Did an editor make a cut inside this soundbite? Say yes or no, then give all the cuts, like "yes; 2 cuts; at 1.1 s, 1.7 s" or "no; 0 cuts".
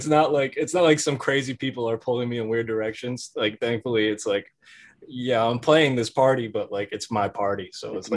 no; 0 cuts